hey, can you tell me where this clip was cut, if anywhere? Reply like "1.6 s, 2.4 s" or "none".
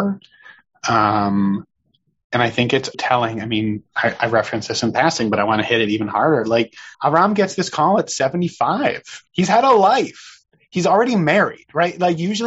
2.9 s, 6.9 s, 9.3 s